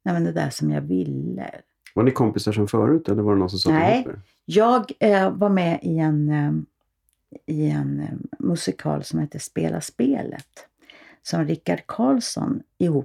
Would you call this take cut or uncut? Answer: uncut